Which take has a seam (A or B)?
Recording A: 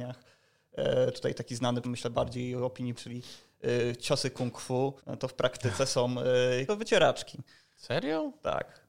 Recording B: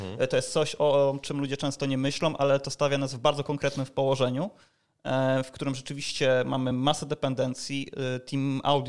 A